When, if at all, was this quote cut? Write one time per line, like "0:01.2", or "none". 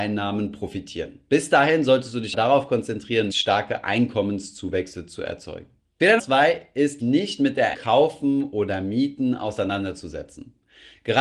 0:02.3
0:03.3
0:06.2
0:07.0
0:07.7

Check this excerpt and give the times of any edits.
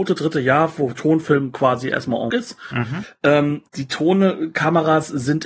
0:02.3
0:03.7

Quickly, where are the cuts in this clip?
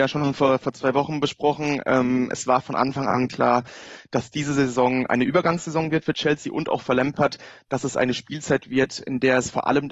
none

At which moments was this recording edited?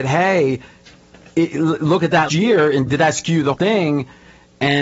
0:02.3
0:02.9
0:03.5

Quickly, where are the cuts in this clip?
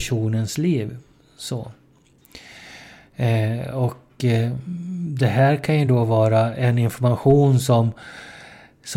none

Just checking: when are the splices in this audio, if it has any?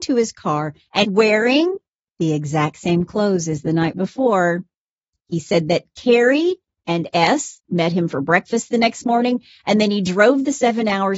0:01.0

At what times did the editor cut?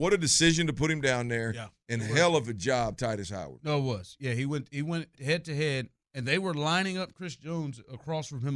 0:02.9
0:05.2

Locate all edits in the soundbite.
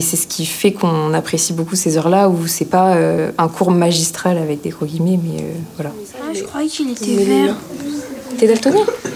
none

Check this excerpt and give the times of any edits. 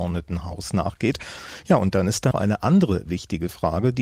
0:02.3

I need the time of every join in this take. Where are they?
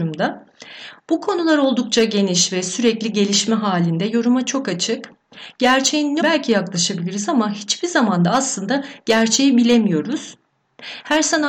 0:06.2

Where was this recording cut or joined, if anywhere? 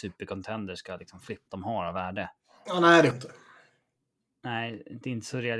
0:01.5
0:03.1

